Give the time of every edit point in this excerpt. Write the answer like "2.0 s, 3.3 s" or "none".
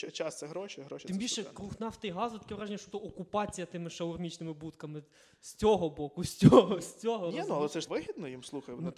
2.9 s, 7.9 s